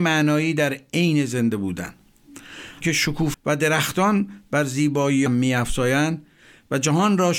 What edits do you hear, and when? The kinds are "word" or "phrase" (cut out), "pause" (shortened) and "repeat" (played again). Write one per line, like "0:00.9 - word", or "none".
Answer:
0:02.8 - word
0:03.3 - word
0:05.3 - word